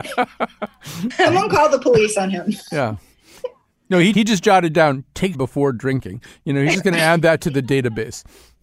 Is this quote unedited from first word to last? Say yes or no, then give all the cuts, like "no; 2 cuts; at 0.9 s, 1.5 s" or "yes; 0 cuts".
no; 2 cuts; at 4.1 s, 5.3 s